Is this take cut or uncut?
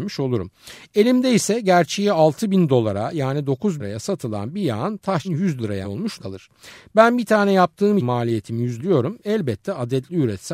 cut